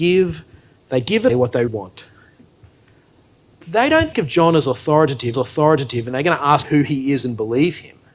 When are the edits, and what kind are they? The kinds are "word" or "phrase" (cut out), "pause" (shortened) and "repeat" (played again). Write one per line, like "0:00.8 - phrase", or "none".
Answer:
0:01.3 - word
0:01.7 - word
0:04.1 - word
0:05.3 - repeat
0:06.6 - word